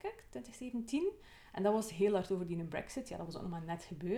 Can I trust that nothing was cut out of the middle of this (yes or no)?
yes